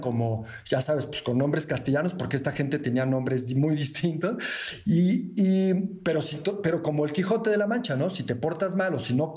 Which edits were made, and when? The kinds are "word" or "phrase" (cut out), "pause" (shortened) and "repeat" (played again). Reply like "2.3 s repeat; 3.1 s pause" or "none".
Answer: none